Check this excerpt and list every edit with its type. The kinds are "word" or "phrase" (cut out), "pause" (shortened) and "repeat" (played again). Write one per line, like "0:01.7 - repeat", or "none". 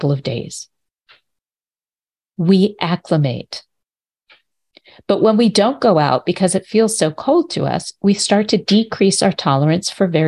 none